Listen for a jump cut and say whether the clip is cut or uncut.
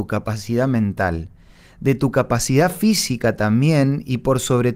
uncut